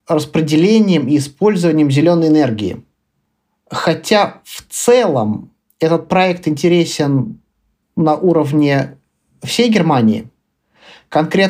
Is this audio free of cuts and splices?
yes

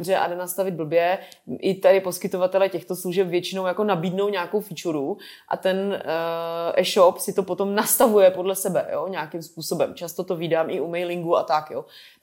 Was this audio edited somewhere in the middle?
no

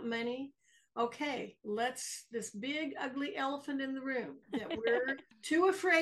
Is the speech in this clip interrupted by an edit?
yes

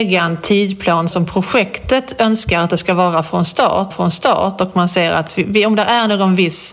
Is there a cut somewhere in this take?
yes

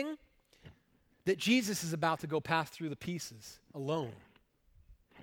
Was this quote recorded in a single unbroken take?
yes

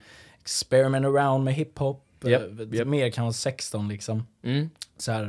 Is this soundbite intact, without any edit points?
yes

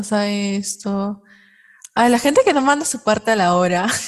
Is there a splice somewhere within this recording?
no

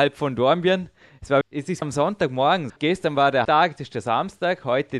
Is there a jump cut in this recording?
yes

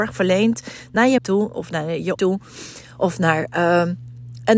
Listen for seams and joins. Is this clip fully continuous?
no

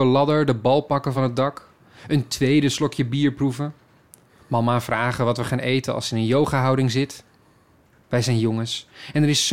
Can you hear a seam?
no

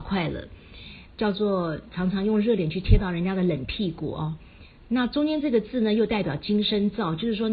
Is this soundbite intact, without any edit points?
no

